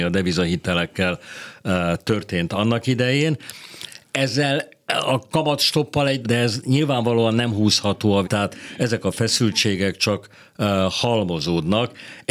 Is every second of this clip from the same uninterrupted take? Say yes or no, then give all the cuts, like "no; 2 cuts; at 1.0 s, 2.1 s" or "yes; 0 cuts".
no; 2 cuts; at 6.2 s, 8.2 s